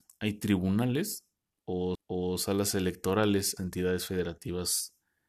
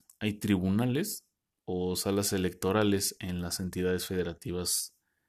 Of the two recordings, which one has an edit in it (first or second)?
first